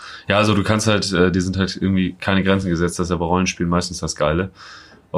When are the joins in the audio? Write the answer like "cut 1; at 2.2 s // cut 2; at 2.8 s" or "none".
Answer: none